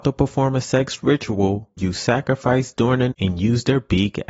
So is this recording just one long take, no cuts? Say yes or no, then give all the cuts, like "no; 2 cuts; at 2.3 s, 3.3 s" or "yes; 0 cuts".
no; 3 cuts; at 1.8 s, 2.7 s, 3.1 s